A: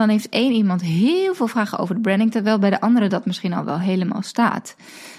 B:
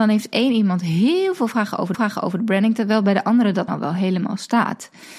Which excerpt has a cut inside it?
B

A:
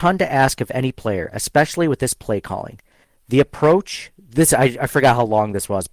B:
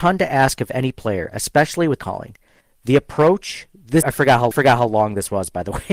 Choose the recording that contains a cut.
B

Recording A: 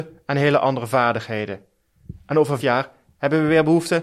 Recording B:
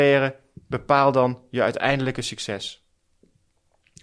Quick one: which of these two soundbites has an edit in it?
A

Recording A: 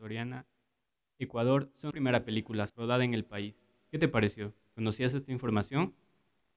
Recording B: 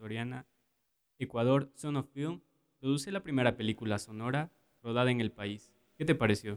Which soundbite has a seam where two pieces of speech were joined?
A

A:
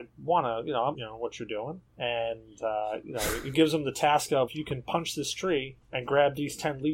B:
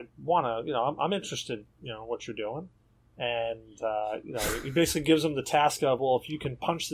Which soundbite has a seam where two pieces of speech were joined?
A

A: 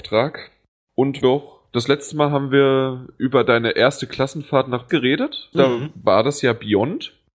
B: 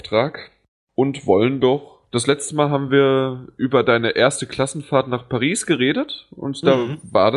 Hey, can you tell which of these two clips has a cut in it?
A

